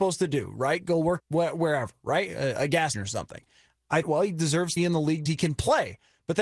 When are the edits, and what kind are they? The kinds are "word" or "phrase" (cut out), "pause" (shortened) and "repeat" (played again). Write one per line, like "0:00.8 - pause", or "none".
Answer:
0:01.2 - word
0:02.9 - word
0:04.0 - word
0:04.8 - word
0:05.3 - word